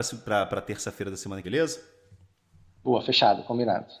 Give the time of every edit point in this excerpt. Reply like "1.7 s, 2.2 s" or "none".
1.4 s